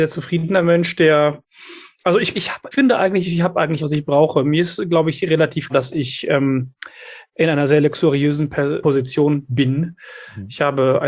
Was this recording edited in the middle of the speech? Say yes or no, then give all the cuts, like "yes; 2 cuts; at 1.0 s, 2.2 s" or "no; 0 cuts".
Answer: yes; 5 cuts; at 2.3 s, 2.7 s, 3.8 s, 5.7 s, 8.8 s